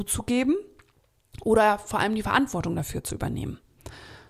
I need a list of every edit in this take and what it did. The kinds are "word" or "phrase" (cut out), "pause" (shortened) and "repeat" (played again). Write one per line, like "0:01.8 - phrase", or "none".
none